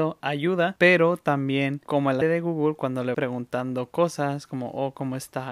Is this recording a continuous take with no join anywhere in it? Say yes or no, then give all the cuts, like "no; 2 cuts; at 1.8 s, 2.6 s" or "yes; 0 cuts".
no; 2 cuts; at 2.2 s, 3.1 s